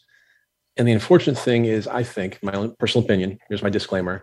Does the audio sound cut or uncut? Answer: uncut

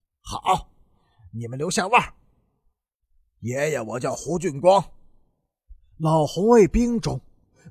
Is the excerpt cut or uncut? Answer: uncut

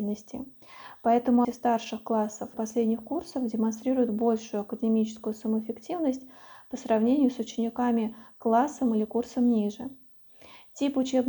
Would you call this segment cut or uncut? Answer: cut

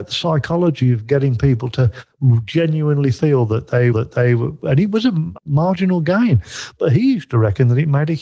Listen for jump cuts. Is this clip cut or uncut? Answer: cut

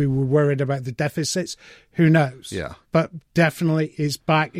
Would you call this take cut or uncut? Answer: cut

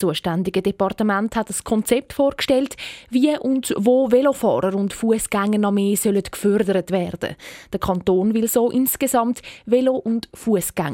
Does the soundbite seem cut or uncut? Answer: uncut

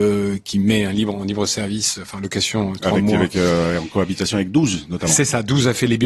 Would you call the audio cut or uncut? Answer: uncut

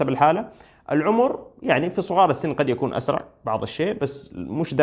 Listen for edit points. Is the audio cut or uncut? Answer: uncut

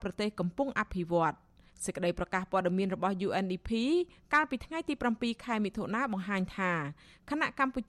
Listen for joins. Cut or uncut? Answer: uncut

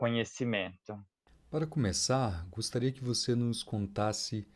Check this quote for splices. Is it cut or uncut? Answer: uncut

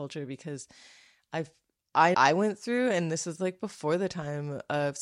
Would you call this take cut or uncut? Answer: cut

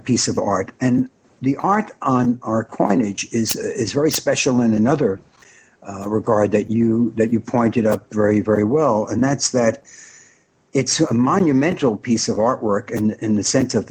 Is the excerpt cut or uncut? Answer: uncut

